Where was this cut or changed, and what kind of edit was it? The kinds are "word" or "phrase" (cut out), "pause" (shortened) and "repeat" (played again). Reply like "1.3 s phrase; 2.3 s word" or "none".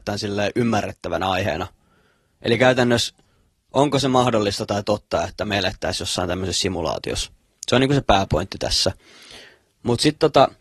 none